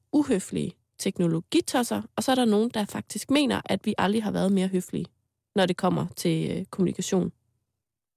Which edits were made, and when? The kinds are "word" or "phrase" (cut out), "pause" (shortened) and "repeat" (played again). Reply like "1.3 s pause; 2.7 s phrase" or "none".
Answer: none